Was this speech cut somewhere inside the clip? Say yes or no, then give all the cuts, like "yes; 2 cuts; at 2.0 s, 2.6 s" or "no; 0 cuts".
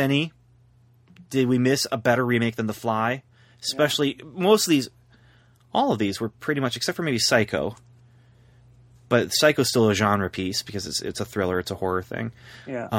no; 0 cuts